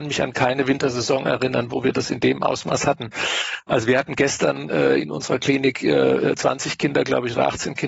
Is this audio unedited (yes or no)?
yes